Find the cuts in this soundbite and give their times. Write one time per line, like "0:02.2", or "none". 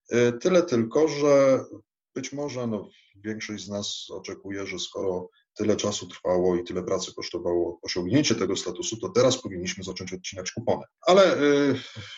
none